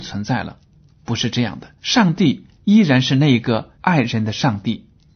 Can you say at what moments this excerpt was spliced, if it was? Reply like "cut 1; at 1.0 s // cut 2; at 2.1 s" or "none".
cut 1; at 1.8 s // cut 2; at 3.7 s